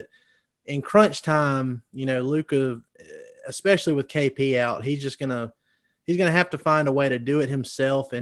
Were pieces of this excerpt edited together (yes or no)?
no